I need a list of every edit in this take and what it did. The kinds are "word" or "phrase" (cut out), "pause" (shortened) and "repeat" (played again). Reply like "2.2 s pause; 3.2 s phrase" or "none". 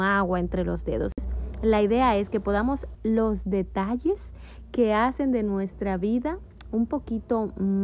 2.9 s word